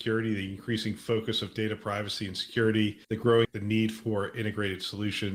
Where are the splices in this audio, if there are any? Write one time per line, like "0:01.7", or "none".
0:03.0
0:03.4